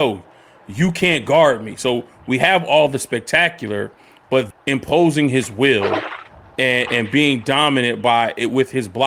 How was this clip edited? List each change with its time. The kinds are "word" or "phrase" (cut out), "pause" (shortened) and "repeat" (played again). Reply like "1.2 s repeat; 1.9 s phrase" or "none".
4.5 s word